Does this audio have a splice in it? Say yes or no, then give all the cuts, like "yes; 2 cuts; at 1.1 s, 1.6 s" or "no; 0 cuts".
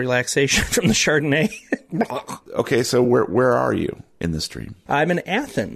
no; 0 cuts